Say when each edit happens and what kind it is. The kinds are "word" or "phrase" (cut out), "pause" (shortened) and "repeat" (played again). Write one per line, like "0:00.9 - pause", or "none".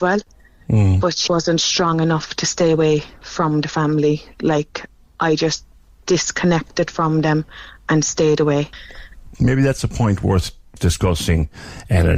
0:01.3 - word

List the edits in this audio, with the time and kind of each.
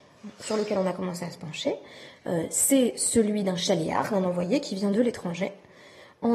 none

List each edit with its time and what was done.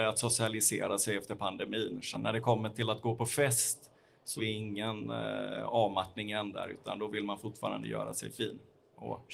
0:02.1 - word
0:04.4 - word

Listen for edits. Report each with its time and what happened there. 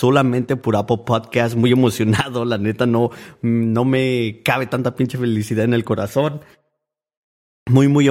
none

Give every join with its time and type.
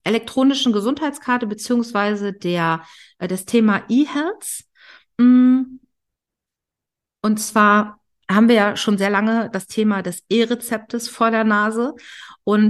none

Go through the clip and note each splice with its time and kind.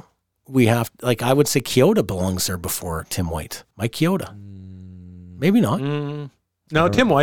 0:03.7 - pause

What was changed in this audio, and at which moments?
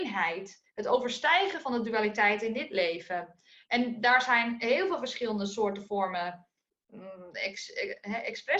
none

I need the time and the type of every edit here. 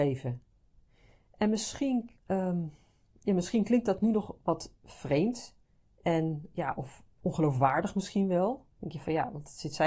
0:02.2 - pause
0:05.6 - pause
0:07.1 - pause
0:08.7 - pause

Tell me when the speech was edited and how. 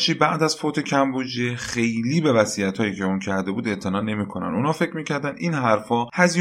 none

